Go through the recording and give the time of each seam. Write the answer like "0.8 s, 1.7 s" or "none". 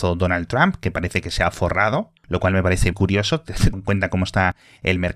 2.2 s, 2.9 s, 3.7 s